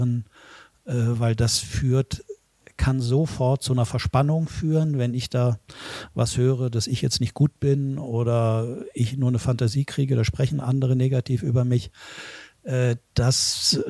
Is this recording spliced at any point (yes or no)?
no